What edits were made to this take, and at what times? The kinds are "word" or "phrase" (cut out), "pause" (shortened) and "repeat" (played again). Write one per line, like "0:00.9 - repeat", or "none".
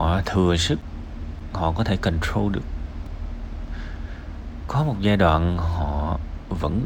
none